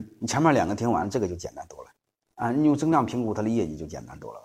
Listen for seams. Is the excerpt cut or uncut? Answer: uncut